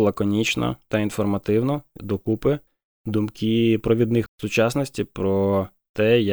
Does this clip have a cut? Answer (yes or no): yes